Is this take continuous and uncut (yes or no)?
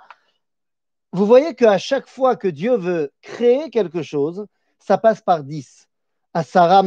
yes